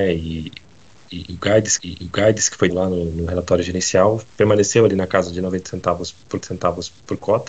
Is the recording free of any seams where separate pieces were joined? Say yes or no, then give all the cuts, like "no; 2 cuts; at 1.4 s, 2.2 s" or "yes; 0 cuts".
no; 4 cuts; at 1.8 s, 2.7 s, 4.3 s, 6.4 s